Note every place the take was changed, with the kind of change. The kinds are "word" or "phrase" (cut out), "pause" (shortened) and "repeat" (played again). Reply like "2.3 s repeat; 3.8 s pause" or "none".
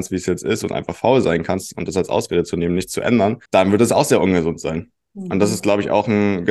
3.4 s pause